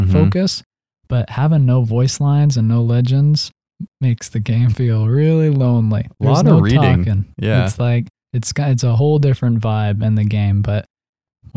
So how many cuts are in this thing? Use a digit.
1